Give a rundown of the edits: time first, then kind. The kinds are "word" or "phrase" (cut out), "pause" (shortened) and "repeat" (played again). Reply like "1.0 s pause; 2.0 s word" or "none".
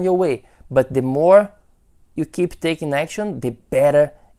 none